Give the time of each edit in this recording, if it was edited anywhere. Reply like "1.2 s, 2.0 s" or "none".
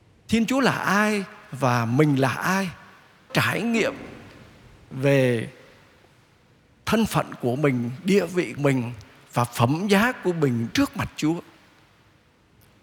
3.3 s, 8.6 s, 10.7 s